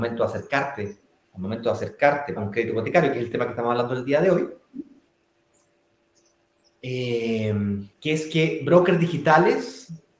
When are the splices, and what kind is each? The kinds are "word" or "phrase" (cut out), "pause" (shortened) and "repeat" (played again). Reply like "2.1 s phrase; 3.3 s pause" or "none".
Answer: 1.2 s pause; 2.4 s word; 7.9 s pause